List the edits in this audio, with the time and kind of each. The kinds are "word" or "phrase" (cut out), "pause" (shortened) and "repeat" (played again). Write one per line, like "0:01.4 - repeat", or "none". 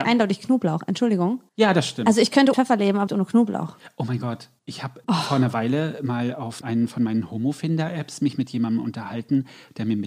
0:01.5 - pause
0:02.5 - phrase
0:03.1 - word
0:04.6 - pause
0:05.0 - pause
0:06.6 - word